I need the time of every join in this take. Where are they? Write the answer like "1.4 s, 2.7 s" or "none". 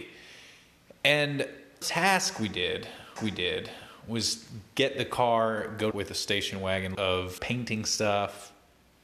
1.8 s, 3.2 s, 5.9 s, 6.9 s, 7.4 s